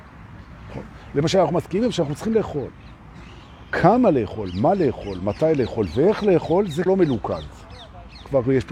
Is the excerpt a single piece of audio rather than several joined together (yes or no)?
no